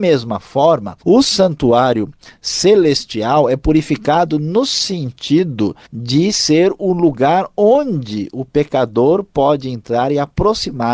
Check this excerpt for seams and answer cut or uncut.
cut